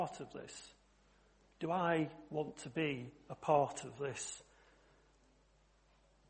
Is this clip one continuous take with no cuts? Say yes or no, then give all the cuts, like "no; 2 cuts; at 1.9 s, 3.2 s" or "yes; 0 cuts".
yes; 0 cuts